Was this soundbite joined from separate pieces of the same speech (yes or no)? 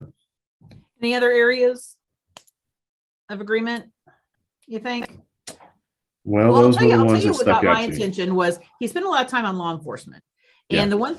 no